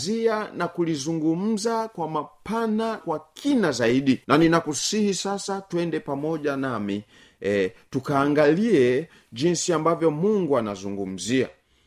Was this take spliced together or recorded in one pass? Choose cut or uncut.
cut